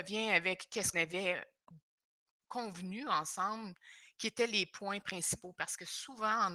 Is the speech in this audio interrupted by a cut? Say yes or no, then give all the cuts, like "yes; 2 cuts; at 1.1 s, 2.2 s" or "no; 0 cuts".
yes; 1 cut; at 0.9 s